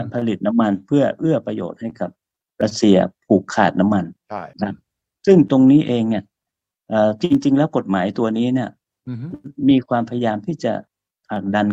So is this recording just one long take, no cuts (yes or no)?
no